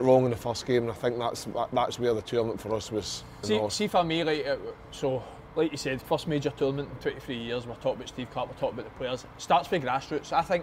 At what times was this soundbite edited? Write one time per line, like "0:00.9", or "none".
0:03.4
0:06.0

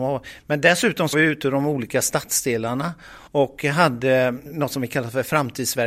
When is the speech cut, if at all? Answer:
0:01.1
0:03.3

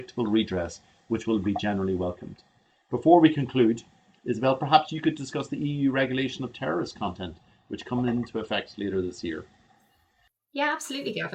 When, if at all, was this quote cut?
none

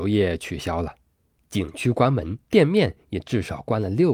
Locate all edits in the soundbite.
0:02.4

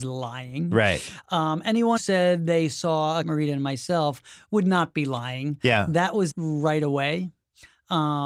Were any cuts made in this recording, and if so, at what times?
0:02.0
0:03.2
0:06.3

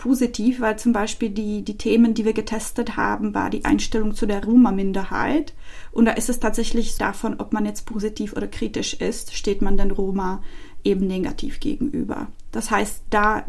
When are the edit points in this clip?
0:07.0

